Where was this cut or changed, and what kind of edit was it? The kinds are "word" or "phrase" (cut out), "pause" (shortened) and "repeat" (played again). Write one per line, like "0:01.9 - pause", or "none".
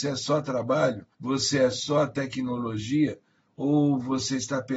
0:01.1 - pause